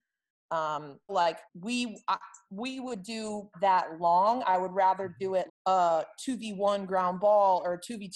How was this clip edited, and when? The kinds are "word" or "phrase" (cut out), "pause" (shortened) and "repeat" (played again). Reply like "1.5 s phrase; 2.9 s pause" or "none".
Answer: 1.1 s word; 1.5 s pause; 3.5 s phrase; 5.5 s word

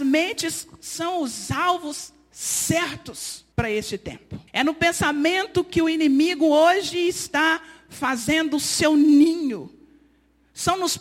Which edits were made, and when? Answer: 3.5 s pause; 4.5 s pause

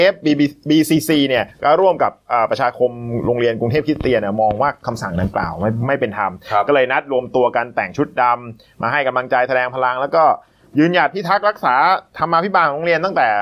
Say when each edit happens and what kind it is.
1.5 s pause

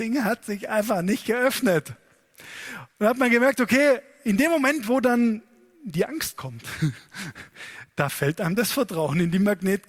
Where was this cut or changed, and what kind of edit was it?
none

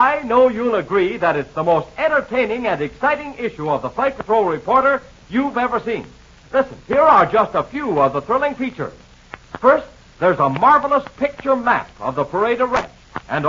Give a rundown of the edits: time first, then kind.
6.8 s pause

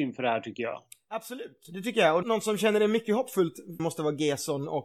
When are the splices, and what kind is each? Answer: 2.2 s word; 3.8 s phrase

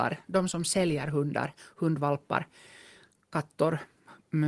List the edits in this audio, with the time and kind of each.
none

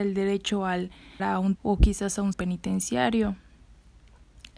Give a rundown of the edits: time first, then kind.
1.2 s word; 1.5 s word; 2.3 s word

